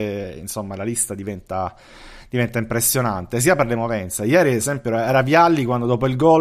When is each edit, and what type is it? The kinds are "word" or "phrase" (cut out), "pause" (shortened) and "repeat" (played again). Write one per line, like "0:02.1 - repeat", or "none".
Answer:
none